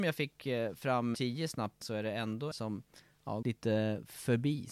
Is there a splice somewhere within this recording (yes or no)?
yes